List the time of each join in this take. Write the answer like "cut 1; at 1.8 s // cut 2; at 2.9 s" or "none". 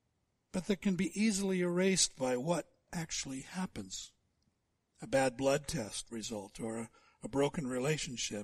none